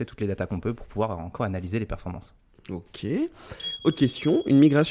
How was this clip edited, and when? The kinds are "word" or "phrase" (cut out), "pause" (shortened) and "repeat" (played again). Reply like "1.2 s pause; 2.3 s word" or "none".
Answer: 1.4 s word

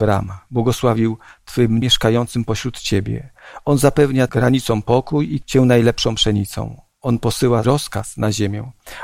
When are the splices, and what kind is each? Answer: 1.8 s word; 4.3 s word; 5.4 s word; 7.6 s word

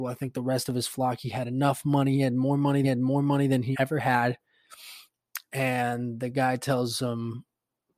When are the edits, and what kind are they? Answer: 2.8 s repeat; 3.7 s word

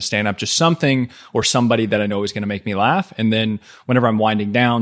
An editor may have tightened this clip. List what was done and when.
none

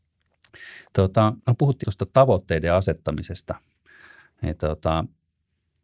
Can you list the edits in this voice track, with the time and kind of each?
1.4 s pause; 1.8 s phrase

